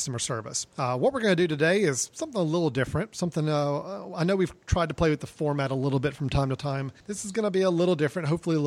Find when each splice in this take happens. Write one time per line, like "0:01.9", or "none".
0:07.0